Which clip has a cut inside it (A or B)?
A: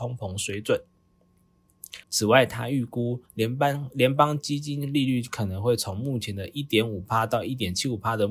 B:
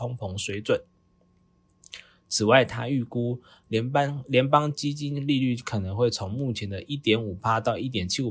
A